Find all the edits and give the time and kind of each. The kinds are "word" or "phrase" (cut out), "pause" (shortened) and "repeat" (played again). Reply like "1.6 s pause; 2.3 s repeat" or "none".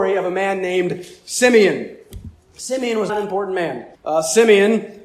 3.1 s word; 3.9 s pause